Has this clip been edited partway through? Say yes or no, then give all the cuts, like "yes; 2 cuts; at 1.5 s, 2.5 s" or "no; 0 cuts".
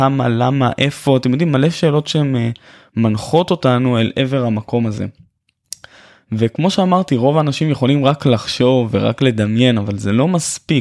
no; 0 cuts